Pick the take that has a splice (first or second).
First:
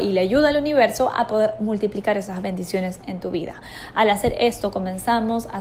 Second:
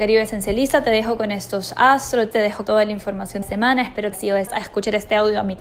second